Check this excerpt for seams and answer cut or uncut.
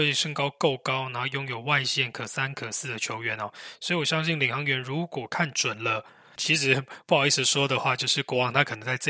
cut